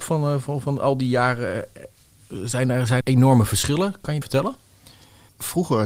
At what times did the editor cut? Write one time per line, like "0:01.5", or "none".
0:03.0
0:04.2